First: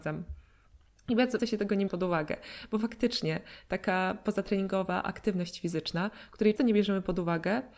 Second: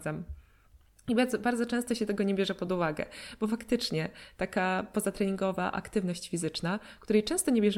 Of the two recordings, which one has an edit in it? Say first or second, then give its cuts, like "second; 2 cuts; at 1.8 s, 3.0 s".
first; 3 cuts; at 1.4 s, 1.9 s, 6.6 s